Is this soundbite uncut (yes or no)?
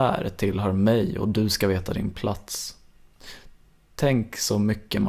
yes